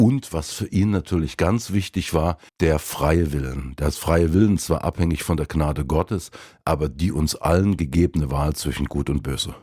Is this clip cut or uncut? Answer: cut